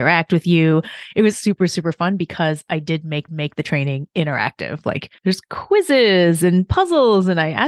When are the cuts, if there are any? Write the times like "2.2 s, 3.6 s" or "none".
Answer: 1.3 s, 3.3 s, 5.2 s